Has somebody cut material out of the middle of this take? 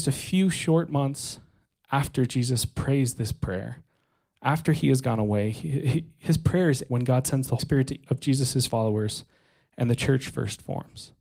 yes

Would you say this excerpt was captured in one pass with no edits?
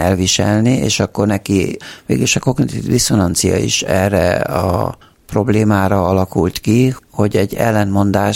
yes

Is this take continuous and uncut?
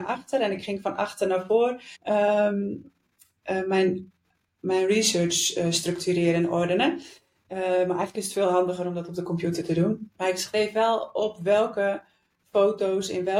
no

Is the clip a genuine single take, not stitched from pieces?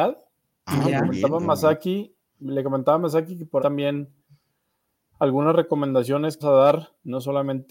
no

